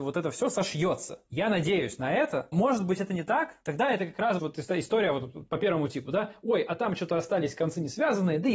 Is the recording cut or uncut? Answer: cut